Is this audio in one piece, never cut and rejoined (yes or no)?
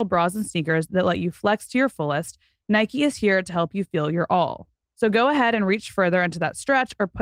yes